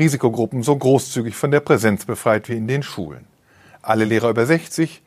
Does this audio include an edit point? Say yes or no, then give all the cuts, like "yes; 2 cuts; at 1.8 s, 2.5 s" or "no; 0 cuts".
no; 0 cuts